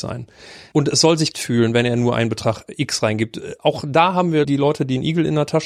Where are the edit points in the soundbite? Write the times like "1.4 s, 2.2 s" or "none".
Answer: 1.3 s, 4.4 s